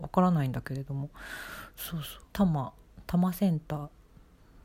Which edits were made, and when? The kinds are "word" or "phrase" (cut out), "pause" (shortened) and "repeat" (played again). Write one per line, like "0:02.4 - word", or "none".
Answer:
0:02.3 - pause